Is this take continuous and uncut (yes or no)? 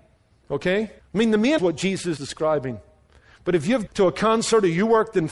no